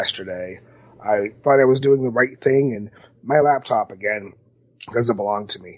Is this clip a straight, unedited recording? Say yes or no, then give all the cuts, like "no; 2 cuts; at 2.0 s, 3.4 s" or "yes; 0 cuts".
yes; 0 cuts